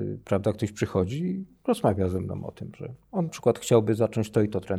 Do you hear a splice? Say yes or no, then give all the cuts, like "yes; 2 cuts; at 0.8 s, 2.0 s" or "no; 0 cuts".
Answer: yes; 1 cut; at 3.3 s